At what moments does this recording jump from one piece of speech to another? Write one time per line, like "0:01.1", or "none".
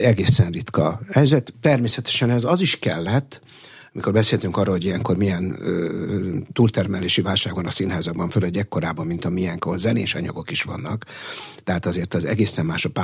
none